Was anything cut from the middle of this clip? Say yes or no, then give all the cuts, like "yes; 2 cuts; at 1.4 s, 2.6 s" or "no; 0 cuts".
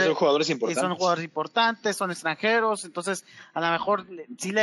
no; 0 cuts